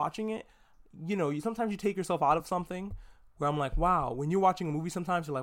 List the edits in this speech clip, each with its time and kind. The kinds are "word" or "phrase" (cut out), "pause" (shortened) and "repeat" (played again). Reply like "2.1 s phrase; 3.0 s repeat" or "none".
none